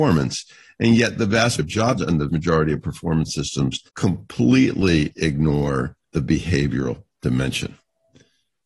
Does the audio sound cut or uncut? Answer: cut